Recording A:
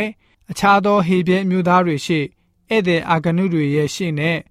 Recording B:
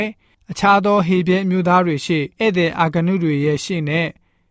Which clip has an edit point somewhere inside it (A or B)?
B